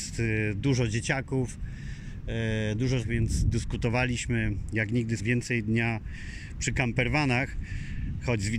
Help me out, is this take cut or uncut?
cut